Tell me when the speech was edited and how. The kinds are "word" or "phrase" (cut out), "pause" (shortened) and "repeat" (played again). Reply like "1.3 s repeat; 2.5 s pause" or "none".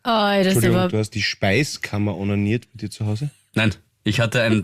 1.1 s word